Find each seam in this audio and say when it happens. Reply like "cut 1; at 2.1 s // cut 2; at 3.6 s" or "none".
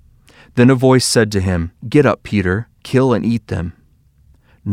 cut 1; at 1.8 s // cut 2; at 2.8 s